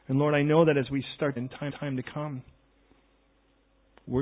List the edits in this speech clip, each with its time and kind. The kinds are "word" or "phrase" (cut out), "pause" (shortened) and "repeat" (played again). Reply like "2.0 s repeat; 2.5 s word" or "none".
1.4 s phrase; 1.7 s repeat